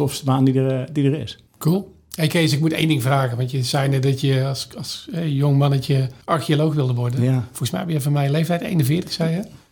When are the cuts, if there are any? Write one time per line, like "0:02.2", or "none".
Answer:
0:01.5
0:06.2